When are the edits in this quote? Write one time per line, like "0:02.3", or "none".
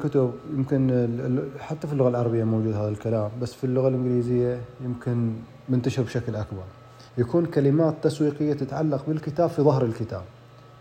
0:07.1